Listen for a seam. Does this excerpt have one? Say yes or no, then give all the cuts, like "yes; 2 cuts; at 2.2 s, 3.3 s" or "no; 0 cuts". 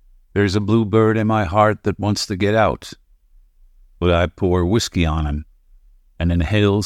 no; 0 cuts